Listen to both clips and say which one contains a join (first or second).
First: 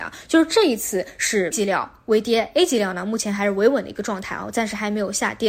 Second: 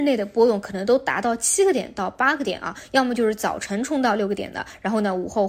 first